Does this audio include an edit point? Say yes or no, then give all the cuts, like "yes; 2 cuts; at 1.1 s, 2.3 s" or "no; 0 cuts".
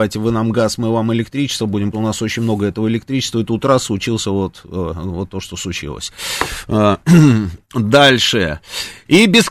yes; 2 cuts; at 1.9 s, 7.6 s